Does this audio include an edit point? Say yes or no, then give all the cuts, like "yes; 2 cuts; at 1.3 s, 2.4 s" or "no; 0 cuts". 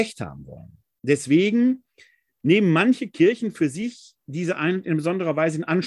no; 0 cuts